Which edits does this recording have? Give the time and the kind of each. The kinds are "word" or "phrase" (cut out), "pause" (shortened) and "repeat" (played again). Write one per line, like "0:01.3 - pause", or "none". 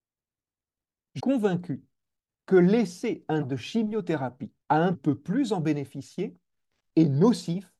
0:01.2 - word
0:03.4 - word
0:04.6 - pause
0:04.9 - phrase